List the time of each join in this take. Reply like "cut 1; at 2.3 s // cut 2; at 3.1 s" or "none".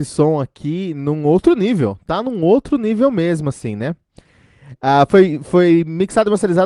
none